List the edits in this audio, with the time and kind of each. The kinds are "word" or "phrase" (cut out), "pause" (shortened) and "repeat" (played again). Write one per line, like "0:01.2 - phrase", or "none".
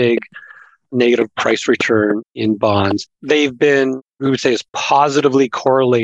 0:03.1 - pause